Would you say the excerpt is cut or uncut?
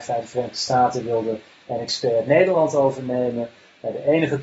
uncut